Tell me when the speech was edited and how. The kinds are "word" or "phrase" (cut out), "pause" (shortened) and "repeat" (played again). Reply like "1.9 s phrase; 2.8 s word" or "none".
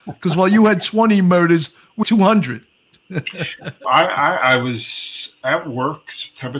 2.0 s word; 3.8 s word